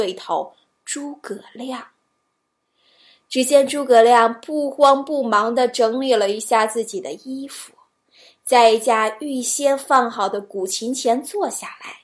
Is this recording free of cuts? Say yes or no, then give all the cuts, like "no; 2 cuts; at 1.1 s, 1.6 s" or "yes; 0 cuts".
yes; 0 cuts